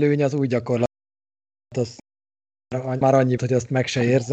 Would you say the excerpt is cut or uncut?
cut